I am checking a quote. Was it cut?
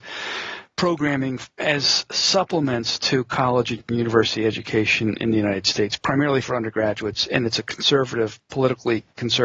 no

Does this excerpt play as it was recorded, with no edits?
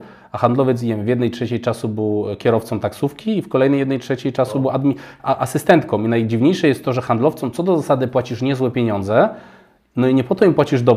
yes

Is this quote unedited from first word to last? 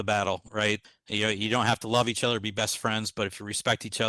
yes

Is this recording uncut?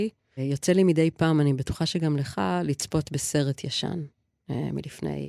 yes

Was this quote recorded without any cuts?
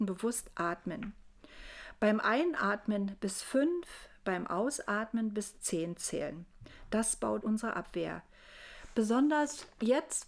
no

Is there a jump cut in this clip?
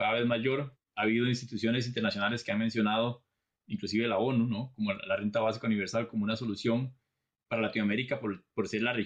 no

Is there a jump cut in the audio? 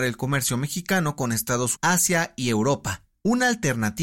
yes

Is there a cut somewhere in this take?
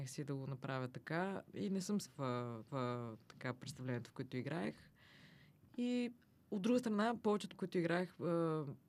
yes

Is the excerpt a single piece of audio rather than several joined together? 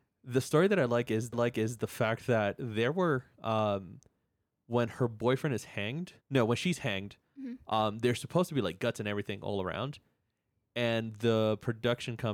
no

